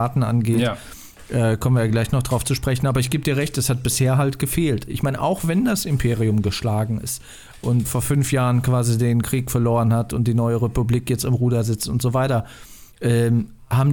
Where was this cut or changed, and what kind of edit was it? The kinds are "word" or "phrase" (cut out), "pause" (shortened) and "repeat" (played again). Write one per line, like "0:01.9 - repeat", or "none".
0:07.8 - word
0:12.9 - pause